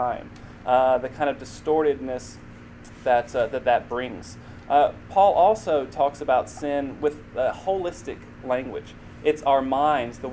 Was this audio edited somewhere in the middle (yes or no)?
no